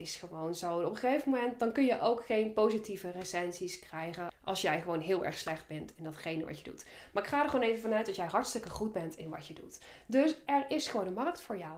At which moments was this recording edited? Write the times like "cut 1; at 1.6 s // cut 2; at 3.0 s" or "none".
none